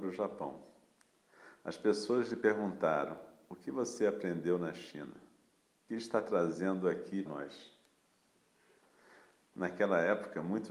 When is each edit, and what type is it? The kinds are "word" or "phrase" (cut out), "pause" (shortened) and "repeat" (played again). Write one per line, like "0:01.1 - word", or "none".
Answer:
0:05.9 - word
0:07.3 - word